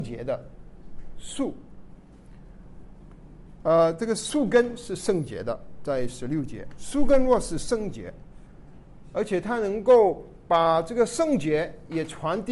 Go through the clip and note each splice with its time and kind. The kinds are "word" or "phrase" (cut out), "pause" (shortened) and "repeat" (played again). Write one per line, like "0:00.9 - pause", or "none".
none

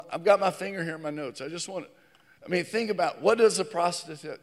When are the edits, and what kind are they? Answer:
none

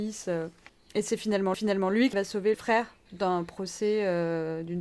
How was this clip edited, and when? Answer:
0:01.5 - repeat
0:02.1 - word
0:02.5 - word
0:03.1 - pause

